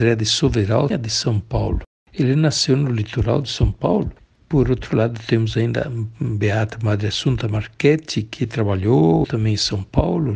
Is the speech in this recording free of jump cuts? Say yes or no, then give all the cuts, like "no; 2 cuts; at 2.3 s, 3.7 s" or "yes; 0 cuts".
no; 2 cuts; at 0.9 s, 9.2 s